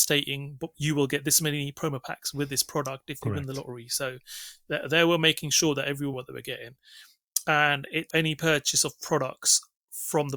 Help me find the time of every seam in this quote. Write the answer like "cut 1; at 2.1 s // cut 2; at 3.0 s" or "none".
cut 1; at 6.1 s // cut 2; at 8.1 s